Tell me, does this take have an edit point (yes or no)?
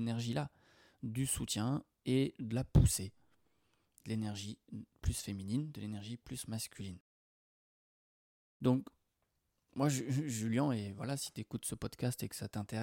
no